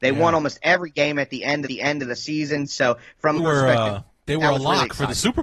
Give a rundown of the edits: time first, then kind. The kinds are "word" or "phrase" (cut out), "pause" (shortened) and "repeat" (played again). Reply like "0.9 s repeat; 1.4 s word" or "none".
1.7 s repeat; 3.4 s word